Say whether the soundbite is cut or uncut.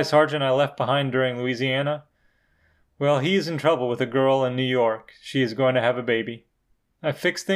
uncut